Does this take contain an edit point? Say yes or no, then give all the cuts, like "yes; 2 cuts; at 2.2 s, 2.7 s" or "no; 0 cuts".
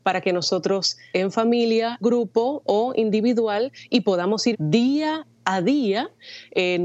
yes; 3 cuts; at 1.1 s, 2.0 s, 4.5 s